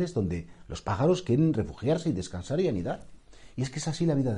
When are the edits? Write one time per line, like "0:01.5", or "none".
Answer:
none